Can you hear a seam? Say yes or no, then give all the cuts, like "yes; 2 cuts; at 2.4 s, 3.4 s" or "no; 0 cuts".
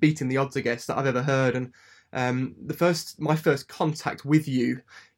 no; 0 cuts